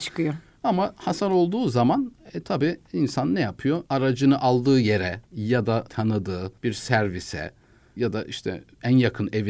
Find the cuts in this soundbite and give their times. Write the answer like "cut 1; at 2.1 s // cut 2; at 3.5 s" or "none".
cut 1; at 3.9 s // cut 2; at 5.3 s // cut 3; at 5.9 s // cut 4; at 6.6 s // cut 5; at 8.0 s